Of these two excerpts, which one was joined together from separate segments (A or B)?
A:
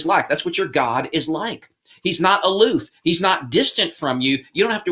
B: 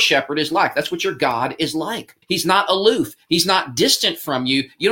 B